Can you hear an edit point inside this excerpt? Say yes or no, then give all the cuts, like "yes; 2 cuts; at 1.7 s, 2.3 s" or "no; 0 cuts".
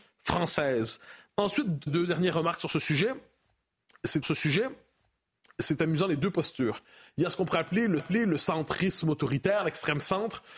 yes; 3 cuts; at 1.9 s, 4.2 s, 8.0 s